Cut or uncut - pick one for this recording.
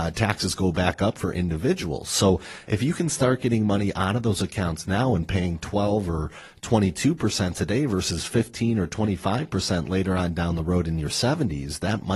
uncut